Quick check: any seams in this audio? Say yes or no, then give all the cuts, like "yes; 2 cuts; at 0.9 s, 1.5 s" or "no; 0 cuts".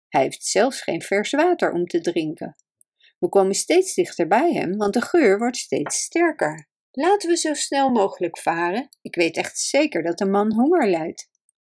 no; 0 cuts